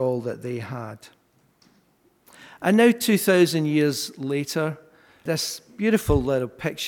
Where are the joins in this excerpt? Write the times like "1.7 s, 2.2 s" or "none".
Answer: none